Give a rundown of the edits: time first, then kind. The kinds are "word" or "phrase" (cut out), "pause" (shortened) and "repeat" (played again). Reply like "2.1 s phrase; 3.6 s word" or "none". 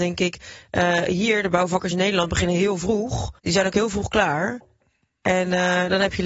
3.4 s pause